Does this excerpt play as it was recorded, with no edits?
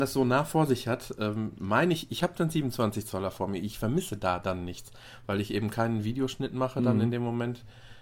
yes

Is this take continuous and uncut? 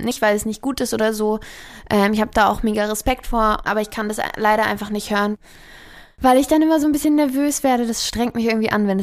yes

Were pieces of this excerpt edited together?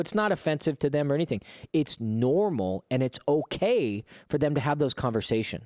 no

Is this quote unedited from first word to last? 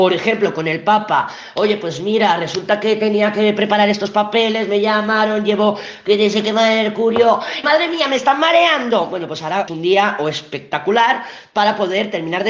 no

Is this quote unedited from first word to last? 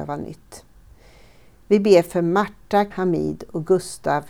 no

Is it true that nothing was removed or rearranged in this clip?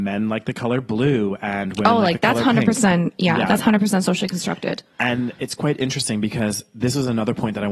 yes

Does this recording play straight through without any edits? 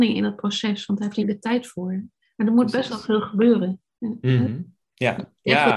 no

